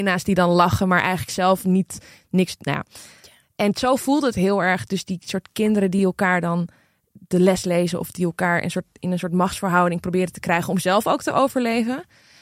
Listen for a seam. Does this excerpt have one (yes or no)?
no